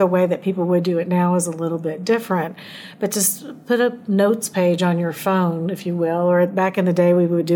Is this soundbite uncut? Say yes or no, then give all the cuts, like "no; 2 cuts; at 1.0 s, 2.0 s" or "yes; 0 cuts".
yes; 0 cuts